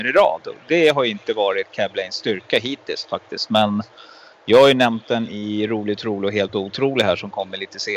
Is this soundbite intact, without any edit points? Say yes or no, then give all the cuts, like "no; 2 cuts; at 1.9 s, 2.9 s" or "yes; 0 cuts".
yes; 0 cuts